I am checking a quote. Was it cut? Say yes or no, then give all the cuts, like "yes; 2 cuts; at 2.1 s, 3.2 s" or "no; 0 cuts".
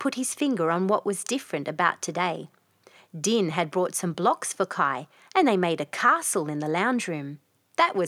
no; 0 cuts